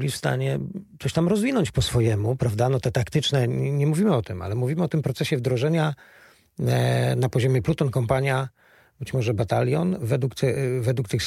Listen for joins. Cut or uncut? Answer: uncut